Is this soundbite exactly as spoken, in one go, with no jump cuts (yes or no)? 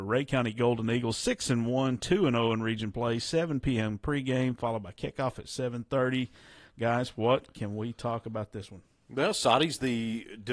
yes